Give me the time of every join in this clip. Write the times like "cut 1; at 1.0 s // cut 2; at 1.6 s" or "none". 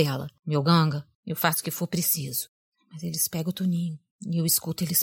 none

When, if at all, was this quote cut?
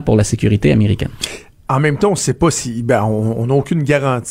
none

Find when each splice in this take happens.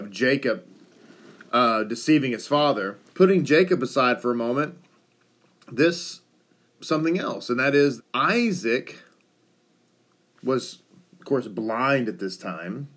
cut 1; at 3.1 s // cut 2; at 6.7 s // cut 3; at 8.0 s

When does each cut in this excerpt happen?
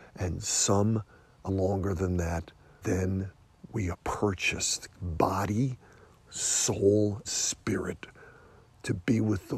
cut 1; at 1.5 s // cut 2; at 2.8 s // cut 3; at 3.9 s // cut 4; at 4.9 s // cut 5; at 7.2 s

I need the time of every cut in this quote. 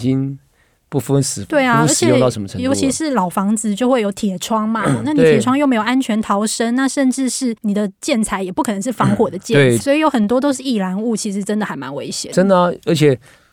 cut 1; at 7.6 s // cut 2; at 9.8 s

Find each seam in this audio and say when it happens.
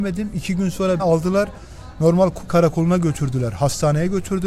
cut 1; at 1.0 s // cut 2; at 2.5 s

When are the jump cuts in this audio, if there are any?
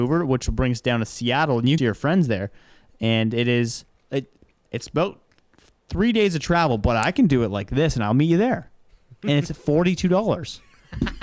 cut 1; at 1.8 s // cut 2; at 3.9 s

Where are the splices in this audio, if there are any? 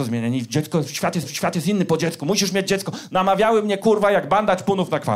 cut 1; at 1.2 s

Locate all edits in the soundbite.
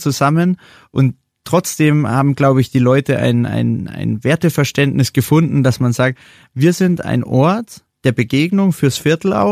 none

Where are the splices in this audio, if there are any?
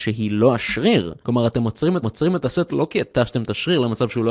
cut 1; at 1.2 s // cut 2; at 2.0 s

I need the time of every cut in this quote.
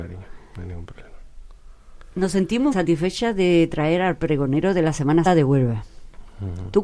cut 1; at 2.7 s // cut 2; at 5.3 s

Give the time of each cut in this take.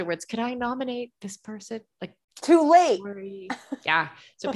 cut 1; at 2.2 s

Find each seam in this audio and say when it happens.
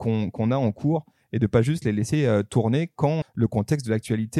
cut 1; at 3.2 s

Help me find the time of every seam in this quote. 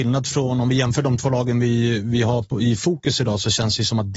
none

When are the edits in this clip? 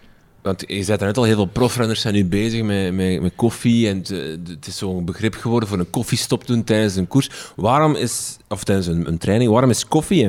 none

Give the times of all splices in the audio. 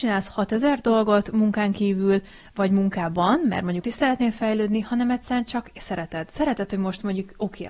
cut 1; at 3.8 s

